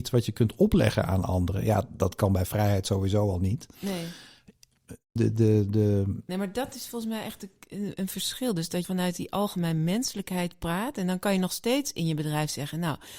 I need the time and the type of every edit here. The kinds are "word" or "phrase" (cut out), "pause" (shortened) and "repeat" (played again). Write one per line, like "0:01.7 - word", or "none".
0:08.8 - word